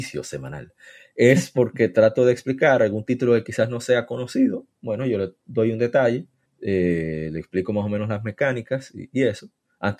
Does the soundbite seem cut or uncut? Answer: cut